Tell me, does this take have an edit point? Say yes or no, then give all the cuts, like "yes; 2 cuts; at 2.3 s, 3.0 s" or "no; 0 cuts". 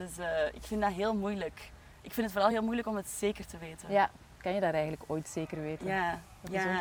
no; 0 cuts